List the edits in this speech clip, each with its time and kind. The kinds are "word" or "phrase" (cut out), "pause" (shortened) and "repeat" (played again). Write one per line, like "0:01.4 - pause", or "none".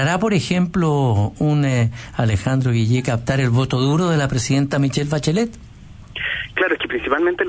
none